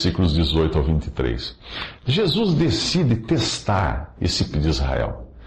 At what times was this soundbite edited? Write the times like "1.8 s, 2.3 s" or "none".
4.5 s